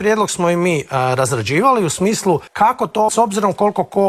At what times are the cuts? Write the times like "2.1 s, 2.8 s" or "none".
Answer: 2.5 s, 3.1 s

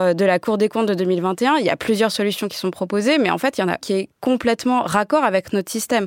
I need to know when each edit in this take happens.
3.8 s

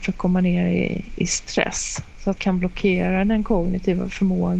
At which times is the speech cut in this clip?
2.4 s

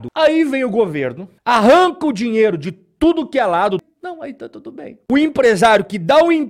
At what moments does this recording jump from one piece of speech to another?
1.4 s

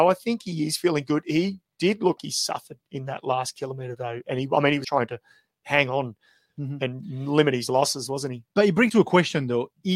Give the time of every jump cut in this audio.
2.2 s, 4.8 s, 8.9 s

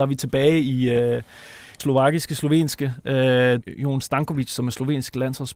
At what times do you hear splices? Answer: 1.8 s, 3.6 s

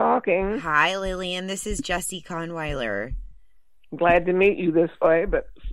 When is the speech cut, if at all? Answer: none

